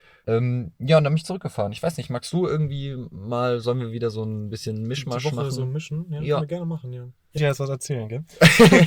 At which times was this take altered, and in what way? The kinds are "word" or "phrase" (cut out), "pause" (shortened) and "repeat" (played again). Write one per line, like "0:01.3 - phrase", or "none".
0:07.4 - word